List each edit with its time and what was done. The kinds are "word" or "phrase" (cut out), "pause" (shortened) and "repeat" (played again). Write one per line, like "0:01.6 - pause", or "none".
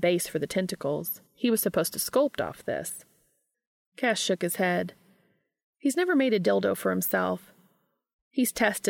0:01.3 - pause

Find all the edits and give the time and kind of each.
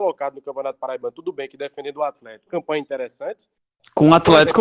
0:02.5 - phrase

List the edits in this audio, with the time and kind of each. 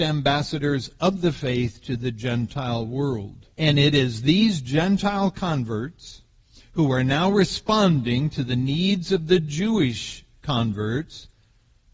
0:03.5 - pause

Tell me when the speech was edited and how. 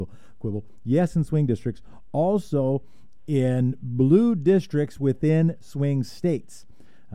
none

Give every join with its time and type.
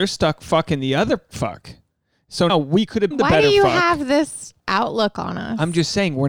0:01.3 - word
0:02.5 - word
0:03.1 - word
0:04.6 - pause

